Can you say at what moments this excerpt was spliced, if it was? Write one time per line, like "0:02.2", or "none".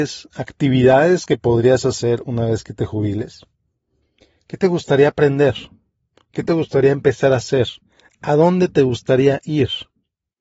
none